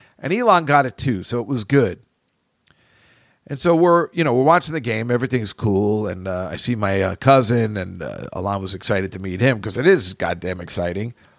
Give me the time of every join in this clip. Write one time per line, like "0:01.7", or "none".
none